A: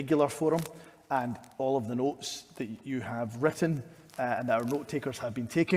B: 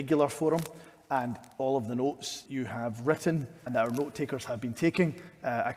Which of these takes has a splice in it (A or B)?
B